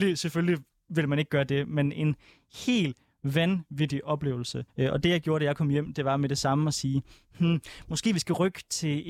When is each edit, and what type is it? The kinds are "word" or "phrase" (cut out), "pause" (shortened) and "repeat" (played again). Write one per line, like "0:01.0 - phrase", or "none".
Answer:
0:04.7 - pause